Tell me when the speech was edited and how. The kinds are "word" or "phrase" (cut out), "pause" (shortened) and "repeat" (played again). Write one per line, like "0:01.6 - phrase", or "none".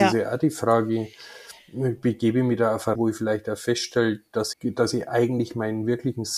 0:02.9 - word
0:04.5 - word